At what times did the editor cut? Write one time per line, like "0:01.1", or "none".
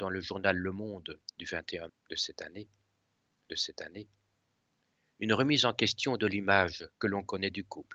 0:01.3
0:01.9
0:03.5
0:06.9